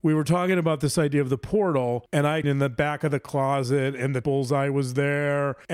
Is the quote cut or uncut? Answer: cut